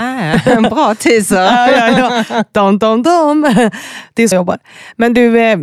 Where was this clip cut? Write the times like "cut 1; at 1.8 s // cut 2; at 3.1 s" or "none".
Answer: cut 1; at 4.3 s